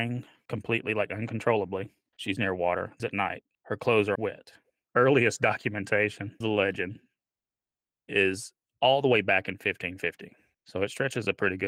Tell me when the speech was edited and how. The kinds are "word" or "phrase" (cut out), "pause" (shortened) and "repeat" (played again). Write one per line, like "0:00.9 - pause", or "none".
0:02.4 - word
0:03.0 - word
0:04.1 - word
0:06.4 - word